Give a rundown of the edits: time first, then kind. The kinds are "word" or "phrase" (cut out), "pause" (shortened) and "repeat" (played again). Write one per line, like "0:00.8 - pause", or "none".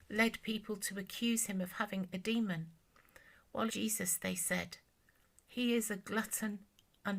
0:03.7 - word